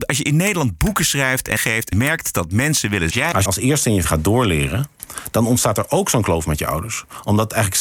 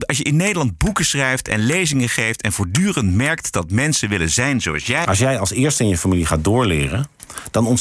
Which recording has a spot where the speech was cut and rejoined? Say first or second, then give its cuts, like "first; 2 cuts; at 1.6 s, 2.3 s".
first; 5 cuts; at 1.6 s, 1.9 s, 3.1 s, 3.5 s, 4.0 s